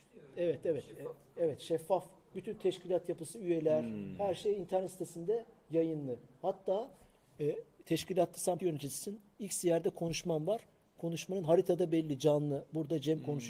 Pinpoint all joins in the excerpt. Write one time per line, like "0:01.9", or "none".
0:08.6